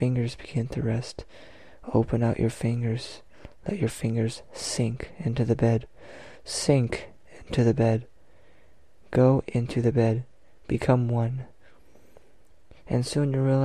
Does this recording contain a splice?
no; 0 cuts

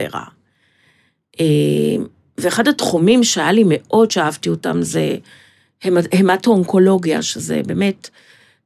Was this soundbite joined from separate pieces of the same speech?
no; 0 cuts

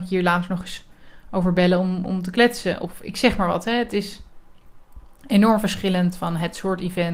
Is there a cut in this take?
no; 0 cuts

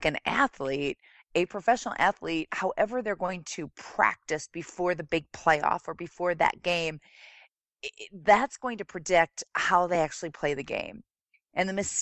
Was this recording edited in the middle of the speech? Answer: no; 0 cuts

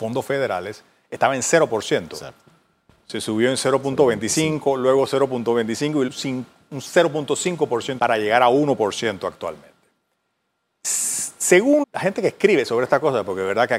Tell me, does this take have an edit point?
yes; 3 cuts; at 6.1 s, 8.0 s, 11.8 s

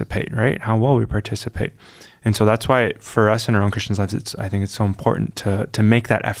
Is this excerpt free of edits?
yes; 0 cuts

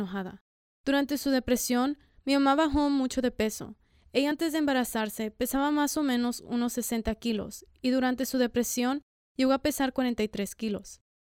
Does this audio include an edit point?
no; 0 cuts

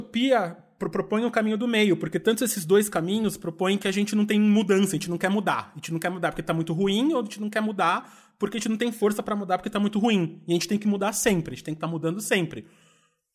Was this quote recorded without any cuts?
yes; 0 cuts

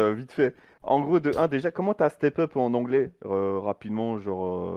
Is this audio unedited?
yes; 0 cuts

